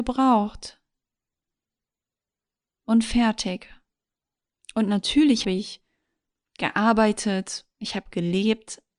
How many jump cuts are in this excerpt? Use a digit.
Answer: 2